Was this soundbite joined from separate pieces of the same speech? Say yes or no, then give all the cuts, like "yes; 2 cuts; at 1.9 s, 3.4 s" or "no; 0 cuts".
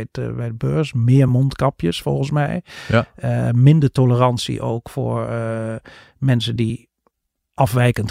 no; 0 cuts